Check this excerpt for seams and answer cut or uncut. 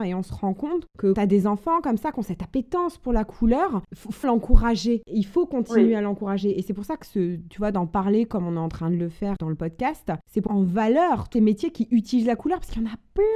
cut